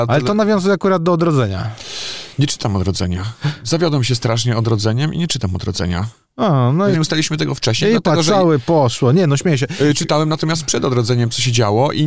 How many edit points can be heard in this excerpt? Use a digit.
1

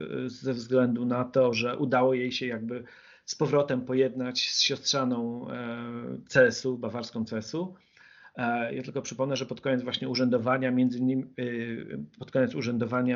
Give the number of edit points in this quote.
0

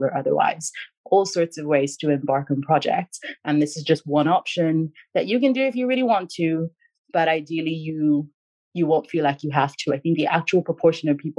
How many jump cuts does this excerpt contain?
0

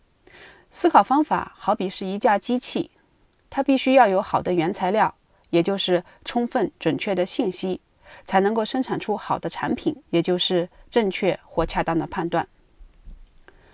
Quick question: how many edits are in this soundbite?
1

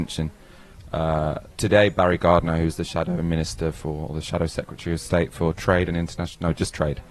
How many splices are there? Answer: 1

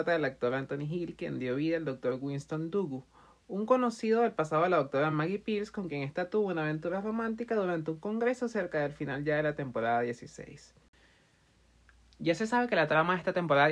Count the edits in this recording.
0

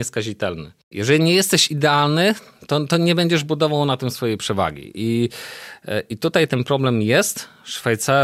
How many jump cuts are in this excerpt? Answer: 0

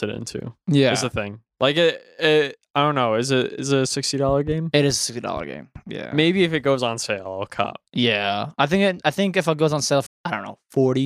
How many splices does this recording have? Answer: 2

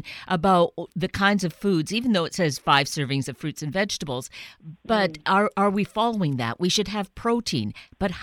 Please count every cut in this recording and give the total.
1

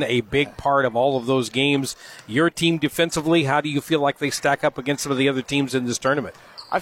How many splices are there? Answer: 0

